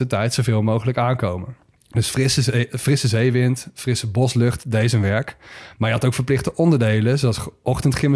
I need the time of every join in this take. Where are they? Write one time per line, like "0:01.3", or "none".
0:01.8